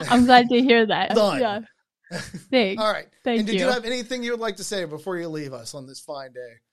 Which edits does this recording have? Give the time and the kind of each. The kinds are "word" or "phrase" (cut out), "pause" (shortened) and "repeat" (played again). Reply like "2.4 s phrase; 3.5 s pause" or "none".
1.1 s word